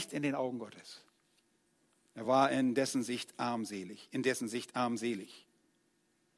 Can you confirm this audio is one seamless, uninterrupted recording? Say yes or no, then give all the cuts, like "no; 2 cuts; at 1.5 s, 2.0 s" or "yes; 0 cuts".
yes; 0 cuts